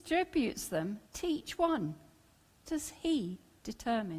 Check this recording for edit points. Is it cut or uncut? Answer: cut